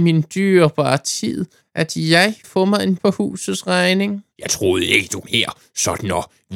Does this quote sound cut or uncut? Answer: cut